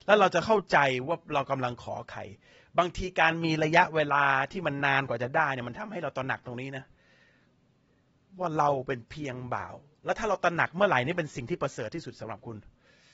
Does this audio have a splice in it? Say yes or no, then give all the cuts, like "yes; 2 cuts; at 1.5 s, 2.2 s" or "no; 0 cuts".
no; 0 cuts